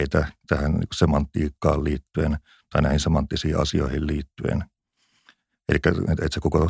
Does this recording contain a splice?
no; 0 cuts

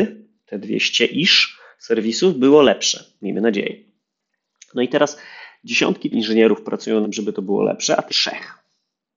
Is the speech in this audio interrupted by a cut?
yes; 3 cuts; at 6.1 s, 7.0 s, 8.1 s

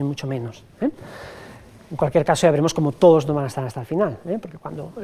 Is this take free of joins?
yes; 0 cuts

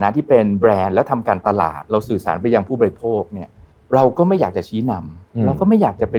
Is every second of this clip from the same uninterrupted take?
no; 1 cut; at 3.7 s

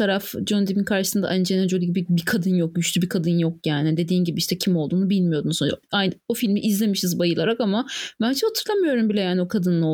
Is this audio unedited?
no; 1 cut; at 5.8 s

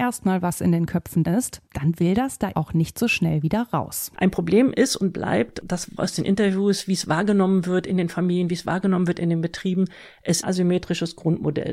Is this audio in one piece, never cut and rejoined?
no; 5 cuts; at 1.2 s, 1.7 s, 2.5 s, 6.0 s, 10.4 s

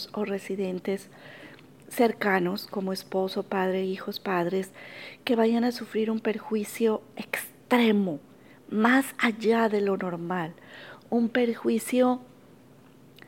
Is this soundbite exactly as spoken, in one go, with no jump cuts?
yes; 0 cuts

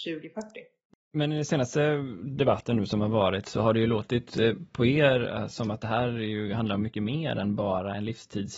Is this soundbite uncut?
yes; 0 cuts

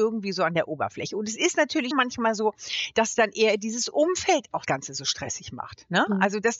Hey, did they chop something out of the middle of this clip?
yes; 2 cuts; at 1.9 s, 4.7 s

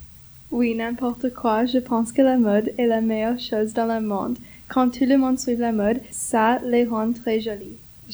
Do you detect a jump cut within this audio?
no; 0 cuts

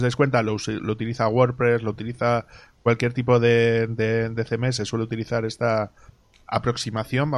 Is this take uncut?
no; 1 cut; at 1.9 s

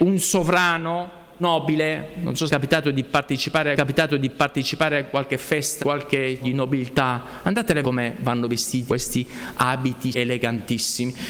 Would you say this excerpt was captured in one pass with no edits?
no; 8 cuts; at 1.4 s, 2.5 s, 3.7 s, 5.8 s, 6.4 s, 7.8 s, 8.9 s, 10.1 s

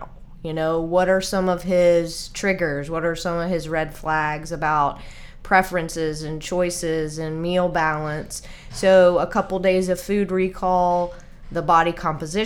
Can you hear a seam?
no; 0 cuts

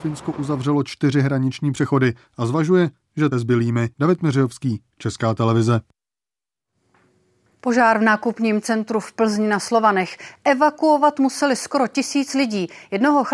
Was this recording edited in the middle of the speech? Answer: yes; 2 cuts; at 3.3 s, 3.9 s

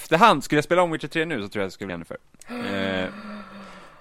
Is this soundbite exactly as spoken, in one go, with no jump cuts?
no; 2 cuts; at 1.9 s, 2.3 s

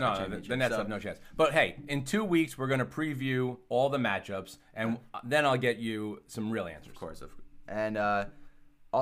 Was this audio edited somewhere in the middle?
no; 0 cuts

